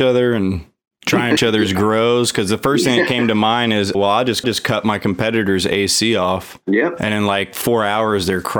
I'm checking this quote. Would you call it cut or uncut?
cut